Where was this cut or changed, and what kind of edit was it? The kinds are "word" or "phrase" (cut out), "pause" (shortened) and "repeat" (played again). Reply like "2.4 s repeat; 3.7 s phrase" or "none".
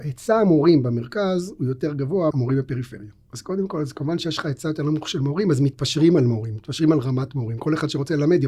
2.3 s word